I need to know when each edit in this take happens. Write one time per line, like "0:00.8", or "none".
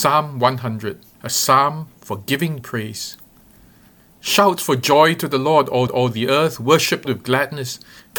0:01.1
0:02.6
0:05.9
0:07.0